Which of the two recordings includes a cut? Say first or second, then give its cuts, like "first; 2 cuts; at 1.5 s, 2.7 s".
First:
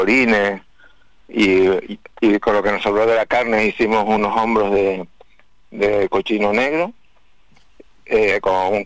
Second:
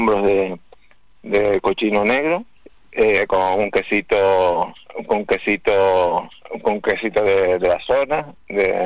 second; 2 cuts; at 2.6 s, 5.3 s